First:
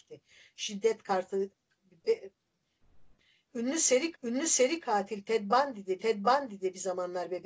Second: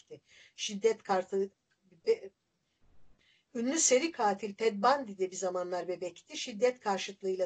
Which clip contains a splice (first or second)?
first